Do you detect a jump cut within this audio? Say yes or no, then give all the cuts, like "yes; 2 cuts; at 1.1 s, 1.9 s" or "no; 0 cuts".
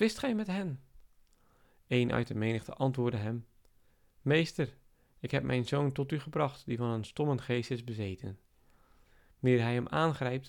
no; 0 cuts